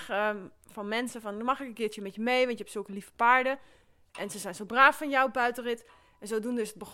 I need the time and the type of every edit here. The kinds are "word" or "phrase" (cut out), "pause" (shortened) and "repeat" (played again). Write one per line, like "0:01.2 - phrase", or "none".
none